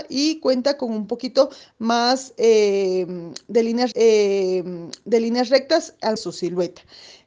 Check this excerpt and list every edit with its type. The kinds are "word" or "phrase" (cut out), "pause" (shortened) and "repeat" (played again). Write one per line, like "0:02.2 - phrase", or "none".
0:03.9 - repeat
0:06.2 - phrase